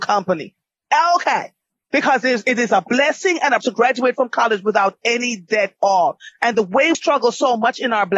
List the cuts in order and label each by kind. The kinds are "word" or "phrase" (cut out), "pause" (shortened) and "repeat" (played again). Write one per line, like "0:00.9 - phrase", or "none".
0:03.6 - word
0:05.8 - word
0:06.9 - word